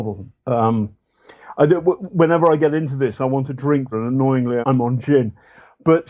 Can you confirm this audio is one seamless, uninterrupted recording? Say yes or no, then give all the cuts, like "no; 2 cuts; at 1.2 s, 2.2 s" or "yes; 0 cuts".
no; 2 cuts; at 3.9 s, 4.6 s